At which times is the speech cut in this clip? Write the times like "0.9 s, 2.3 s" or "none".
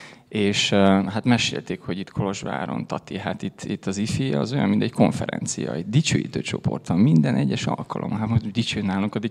none